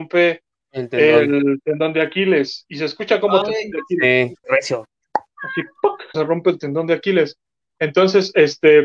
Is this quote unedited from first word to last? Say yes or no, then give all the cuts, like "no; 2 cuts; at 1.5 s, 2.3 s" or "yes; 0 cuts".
no; 3 cuts; at 3.4 s, 4.4 s, 6.1 s